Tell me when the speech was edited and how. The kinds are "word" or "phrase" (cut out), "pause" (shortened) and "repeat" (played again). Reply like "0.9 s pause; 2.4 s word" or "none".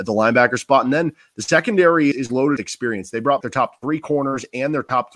2.1 s word; 2.6 s word; 3.4 s word